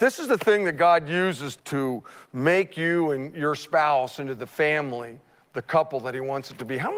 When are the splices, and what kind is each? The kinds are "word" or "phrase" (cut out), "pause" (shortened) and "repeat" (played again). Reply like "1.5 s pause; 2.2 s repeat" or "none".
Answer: 1.6 s word